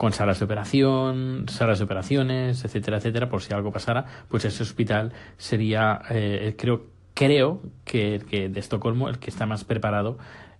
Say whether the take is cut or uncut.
uncut